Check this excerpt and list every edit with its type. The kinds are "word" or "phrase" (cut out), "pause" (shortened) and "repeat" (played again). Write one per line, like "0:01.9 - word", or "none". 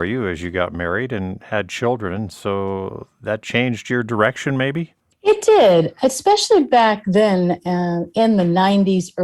none